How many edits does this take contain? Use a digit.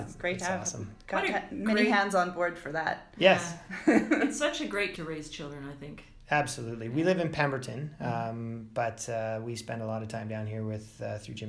1